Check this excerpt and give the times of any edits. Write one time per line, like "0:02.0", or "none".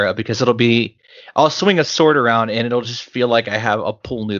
none